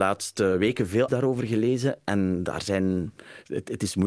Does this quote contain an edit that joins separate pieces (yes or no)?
yes